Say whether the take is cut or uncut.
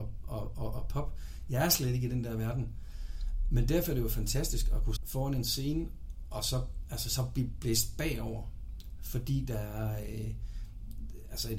cut